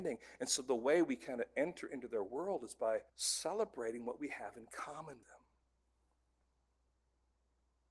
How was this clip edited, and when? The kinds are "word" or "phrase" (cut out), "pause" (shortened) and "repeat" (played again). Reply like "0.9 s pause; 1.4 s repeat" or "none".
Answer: 3.1 s pause; 5.2 s word